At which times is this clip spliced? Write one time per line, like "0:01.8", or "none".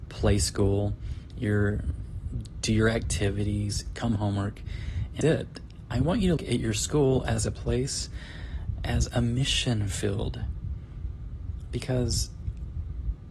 0:04.2
0:05.2
0:06.4